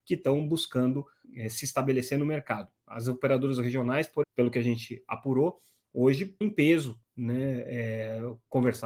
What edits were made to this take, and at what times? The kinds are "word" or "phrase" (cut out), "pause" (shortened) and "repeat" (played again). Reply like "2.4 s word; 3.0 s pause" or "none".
1.2 s word; 4.2 s word; 6.4 s word